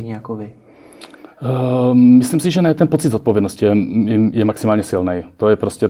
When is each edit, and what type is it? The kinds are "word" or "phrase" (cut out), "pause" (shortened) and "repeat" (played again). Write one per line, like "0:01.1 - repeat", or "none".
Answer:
none